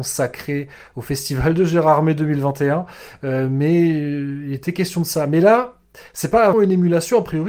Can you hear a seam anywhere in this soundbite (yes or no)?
yes